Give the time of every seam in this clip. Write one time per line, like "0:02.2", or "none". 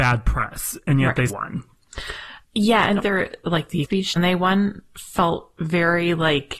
0:01.3
0:02.4
0:03.0
0:03.8
0:04.2